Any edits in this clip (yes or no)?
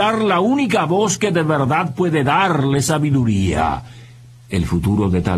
no